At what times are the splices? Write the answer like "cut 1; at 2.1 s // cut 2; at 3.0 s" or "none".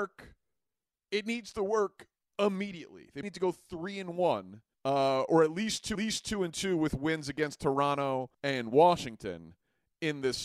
cut 1; at 3.2 s // cut 2; at 4.7 s // cut 3; at 5.9 s // cut 4; at 8.3 s